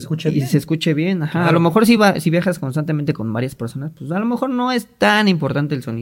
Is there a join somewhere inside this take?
no; 0 cuts

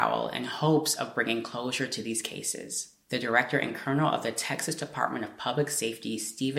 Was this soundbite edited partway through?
no; 0 cuts

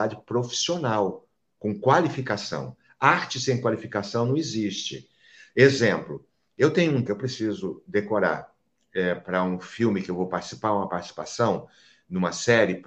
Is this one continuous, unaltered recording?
no; 1 cut; at 7.1 s

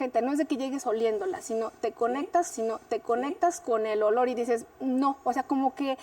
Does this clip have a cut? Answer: yes; 1 cut; at 2.5 s

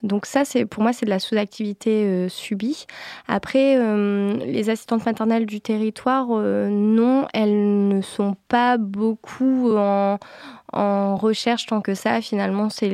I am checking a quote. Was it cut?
no; 0 cuts

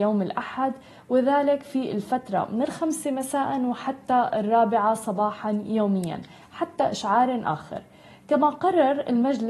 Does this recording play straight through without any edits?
yes; 0 cuts

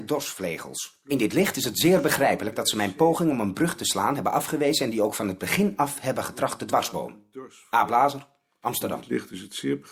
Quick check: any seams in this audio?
no; 0 cuts

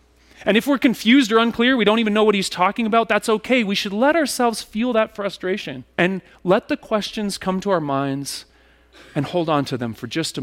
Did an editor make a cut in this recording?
yes; 1 cut; at 5.9 s

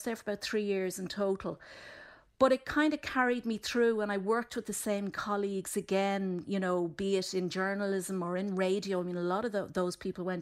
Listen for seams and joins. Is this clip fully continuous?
yes; 0 cuts

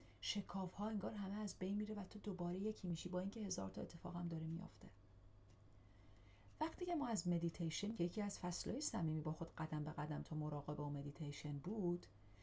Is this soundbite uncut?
no; 1 cut; at 7.9 s

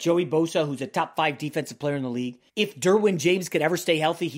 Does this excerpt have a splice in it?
yes; 1 cut; at 2.5 s

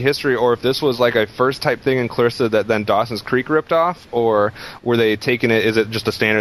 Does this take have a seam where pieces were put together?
no; 0 cuts

